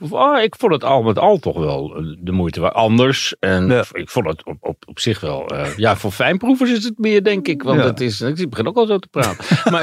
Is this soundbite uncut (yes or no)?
yes